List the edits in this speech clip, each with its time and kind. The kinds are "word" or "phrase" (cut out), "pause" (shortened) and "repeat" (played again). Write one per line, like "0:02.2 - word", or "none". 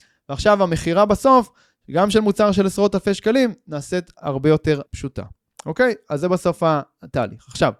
0:04.9 - pause